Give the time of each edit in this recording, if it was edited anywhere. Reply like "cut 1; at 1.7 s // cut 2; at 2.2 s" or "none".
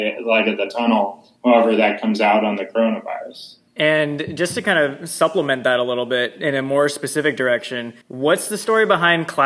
cut 1; at 1.4 s // cut 2; at 3.7 s // cut 3; at 8.0 s